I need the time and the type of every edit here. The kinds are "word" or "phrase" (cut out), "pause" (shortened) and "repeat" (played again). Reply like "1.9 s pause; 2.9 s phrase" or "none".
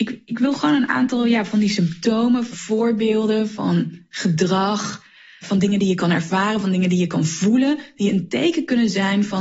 2.5 s word; 5.4 s word